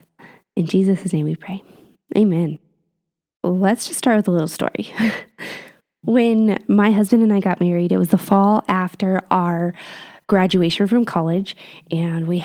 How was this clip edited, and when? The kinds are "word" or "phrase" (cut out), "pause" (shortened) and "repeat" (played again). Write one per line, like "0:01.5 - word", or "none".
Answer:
none